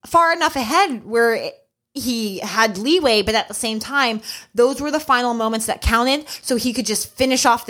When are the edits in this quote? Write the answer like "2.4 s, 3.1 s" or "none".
none